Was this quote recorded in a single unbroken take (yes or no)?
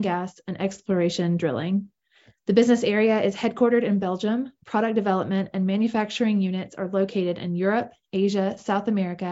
yes